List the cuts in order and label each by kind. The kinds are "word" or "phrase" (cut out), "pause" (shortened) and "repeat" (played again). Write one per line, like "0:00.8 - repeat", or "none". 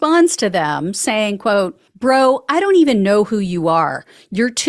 0:01.9 - pause